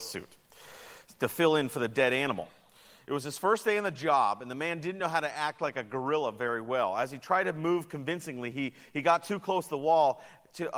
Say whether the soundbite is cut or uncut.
uncut